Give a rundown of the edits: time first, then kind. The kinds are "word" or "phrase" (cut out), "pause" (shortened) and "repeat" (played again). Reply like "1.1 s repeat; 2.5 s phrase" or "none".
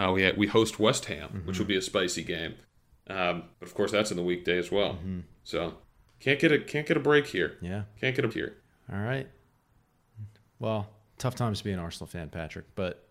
8.3 s word